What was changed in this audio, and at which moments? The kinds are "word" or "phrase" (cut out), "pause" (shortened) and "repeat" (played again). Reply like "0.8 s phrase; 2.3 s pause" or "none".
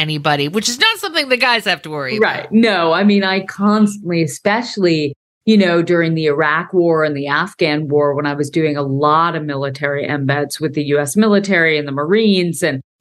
none